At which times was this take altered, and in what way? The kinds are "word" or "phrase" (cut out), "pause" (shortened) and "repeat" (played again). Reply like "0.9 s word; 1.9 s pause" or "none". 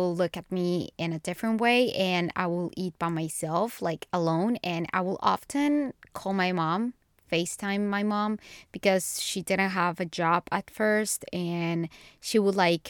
none